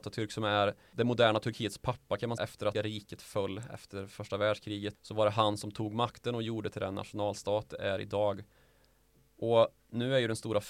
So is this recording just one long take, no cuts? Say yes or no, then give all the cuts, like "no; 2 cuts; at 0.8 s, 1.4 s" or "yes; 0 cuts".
no; 5 cuts; at 0.9 s, 2.4 s, 2.7 s, 4.9 s, 6.7 s